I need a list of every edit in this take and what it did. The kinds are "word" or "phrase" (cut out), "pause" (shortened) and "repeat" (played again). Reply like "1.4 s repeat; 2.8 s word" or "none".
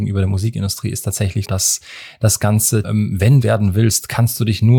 1.4 s word; 2.8 s word; 3.4 s phrase